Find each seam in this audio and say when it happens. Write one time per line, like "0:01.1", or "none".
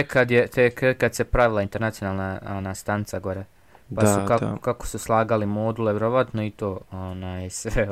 none